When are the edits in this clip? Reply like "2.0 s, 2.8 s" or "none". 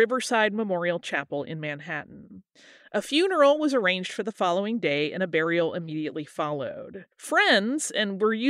7.1 s